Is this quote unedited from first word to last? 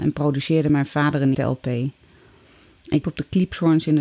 no; 2 cuts; at 1.3 s, 3.0 s

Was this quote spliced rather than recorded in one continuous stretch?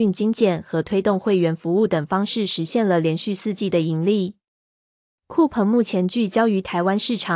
no; 0 cuts

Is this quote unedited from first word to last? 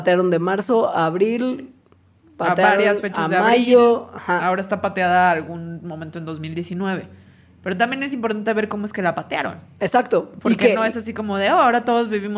yes; 0 cuts

